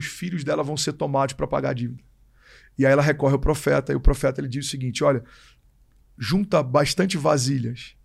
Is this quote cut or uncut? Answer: uncut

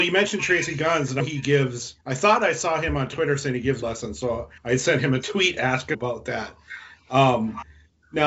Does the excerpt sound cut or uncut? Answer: cut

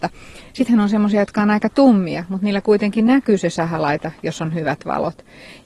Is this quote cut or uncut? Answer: uncut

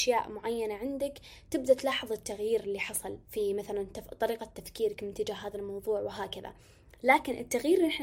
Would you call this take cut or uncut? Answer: cut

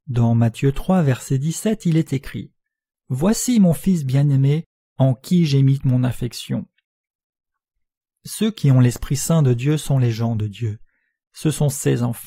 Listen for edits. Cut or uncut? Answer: cut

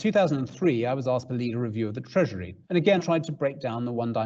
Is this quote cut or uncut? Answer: cut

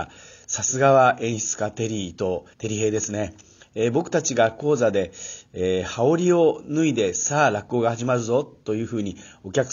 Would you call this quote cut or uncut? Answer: cut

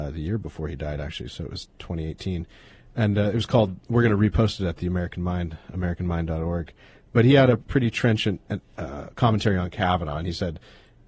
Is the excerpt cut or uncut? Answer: uncut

